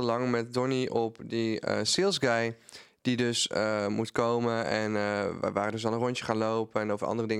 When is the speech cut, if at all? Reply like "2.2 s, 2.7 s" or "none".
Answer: none